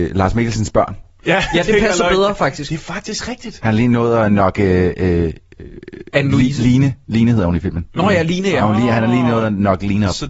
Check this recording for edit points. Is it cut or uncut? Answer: uncut